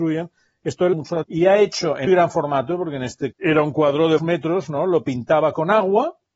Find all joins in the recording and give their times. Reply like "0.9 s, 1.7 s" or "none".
0.9 s, 1.2 s, 2.1 s, 3.3 s, 4.2 s